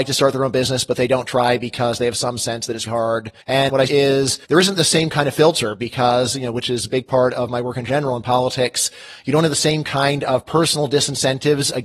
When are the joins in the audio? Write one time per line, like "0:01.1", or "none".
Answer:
0:02.9
0:03.4
0:03.9
0:04.4